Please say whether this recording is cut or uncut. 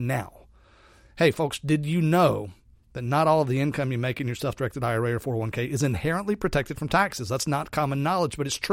uncut